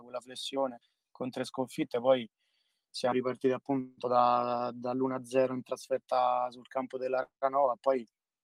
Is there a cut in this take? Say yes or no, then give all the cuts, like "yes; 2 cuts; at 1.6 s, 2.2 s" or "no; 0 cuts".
no; 0 cuts